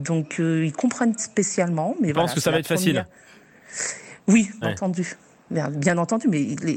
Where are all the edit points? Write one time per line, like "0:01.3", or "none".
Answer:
0:01.2
0:04.6